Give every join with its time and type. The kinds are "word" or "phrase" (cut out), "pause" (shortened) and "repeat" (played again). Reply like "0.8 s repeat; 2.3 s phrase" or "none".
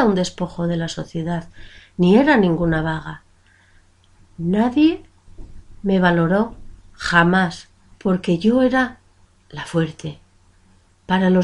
7.9 s pause